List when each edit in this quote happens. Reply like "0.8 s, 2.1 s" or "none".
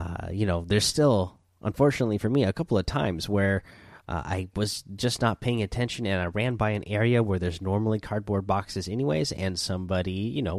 none

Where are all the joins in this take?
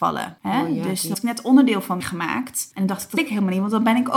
1.1 s, 2.0 s, 3.2 s

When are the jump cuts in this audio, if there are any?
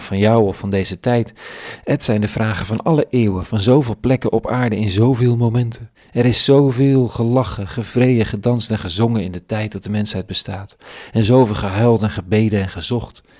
5.9 s

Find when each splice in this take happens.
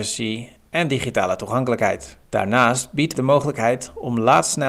2.2 s, 3.1 s

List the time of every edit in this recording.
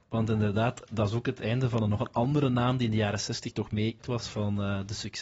4.0 s

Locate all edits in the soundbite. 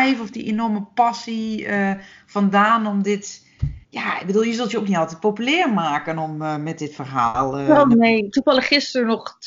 3.8 s

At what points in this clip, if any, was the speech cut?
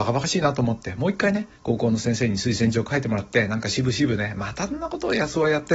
1.5 s

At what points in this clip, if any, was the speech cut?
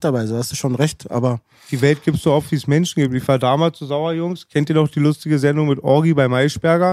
none

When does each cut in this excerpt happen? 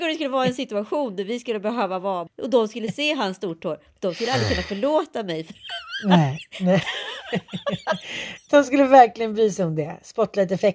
2.3 s

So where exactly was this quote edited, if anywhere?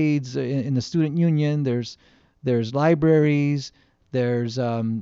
none

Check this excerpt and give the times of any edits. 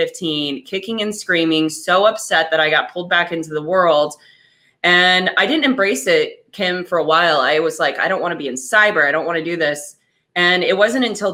none

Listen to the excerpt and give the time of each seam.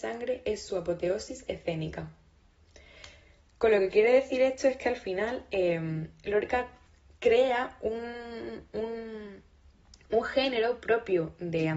none

